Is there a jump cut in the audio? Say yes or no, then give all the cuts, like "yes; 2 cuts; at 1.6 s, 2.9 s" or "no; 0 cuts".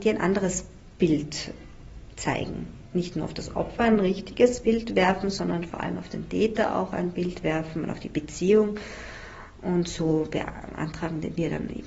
no; 0 cuts